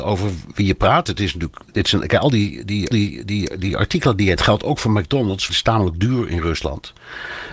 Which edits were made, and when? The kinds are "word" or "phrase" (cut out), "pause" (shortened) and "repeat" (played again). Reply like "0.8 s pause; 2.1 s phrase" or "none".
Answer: 1.7 s pause; 2.9 s repeat; 4.4 s phrase; 5.5 s phrase